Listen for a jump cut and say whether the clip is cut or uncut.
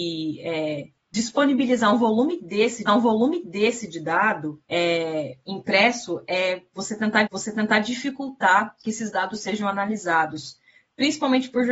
cut